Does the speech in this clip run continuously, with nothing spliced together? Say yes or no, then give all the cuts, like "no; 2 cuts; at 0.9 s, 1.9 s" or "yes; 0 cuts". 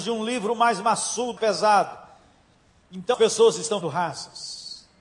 no; 3 cuts; at 1.4 s, 3.1 s, 3.8 s